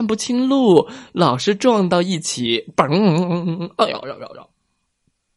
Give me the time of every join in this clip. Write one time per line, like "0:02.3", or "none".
0:04.0